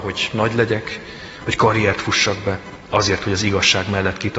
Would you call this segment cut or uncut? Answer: uncut